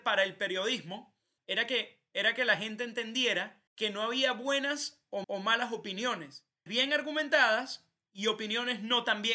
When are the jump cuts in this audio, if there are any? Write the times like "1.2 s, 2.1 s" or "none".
1.4 s, 3.7 s, 5.2 s, 6.7 s